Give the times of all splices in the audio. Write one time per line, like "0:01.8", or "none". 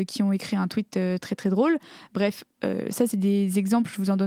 none

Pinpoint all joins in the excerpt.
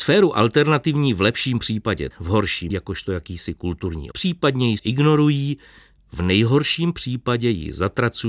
0:02.1
0:02.7
0:04.1
0:04.8

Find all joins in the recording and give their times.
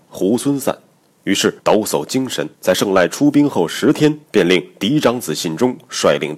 0:01.6
0:02.5
0:04.2

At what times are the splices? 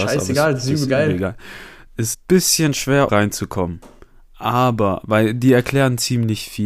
0:02.1
0:03.1

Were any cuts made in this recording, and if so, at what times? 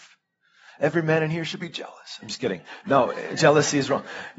none

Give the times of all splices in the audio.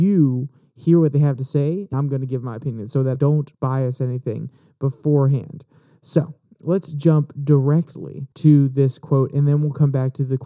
0:01.9
0:03.1
0:03.5
0:08.3

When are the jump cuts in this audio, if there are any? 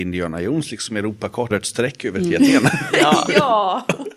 0:01.5

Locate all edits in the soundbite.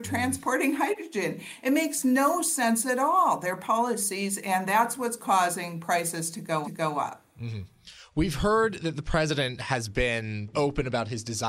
0:06.6
0:10.5

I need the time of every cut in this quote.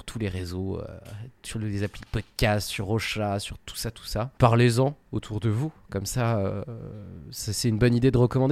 none

